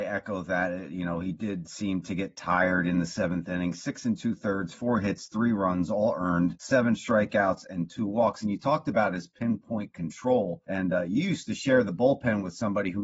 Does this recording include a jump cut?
no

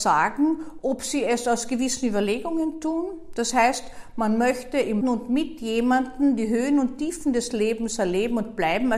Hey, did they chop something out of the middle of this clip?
yes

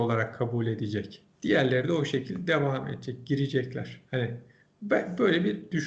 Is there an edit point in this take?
yes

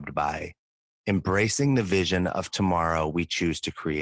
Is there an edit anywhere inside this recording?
no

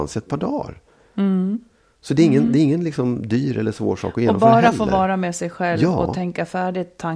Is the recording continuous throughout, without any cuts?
yes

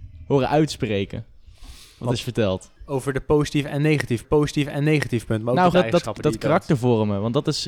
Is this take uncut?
no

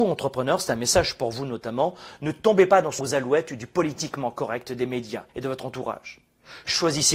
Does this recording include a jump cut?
yes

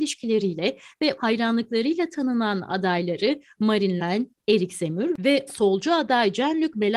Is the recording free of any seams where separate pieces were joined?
no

